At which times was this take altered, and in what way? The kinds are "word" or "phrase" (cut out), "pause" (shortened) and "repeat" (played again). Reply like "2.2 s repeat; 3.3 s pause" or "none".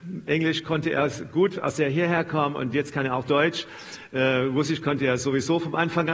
none